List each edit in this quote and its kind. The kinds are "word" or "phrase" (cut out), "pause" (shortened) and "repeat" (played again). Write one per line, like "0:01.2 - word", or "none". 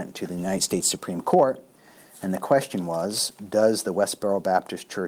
none